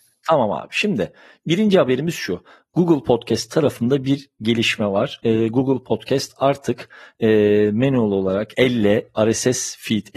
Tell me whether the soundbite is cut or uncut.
uncut